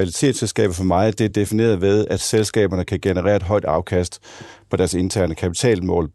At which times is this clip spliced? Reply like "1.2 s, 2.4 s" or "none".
none